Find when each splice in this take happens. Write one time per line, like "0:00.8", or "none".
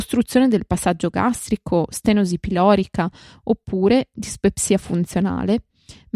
none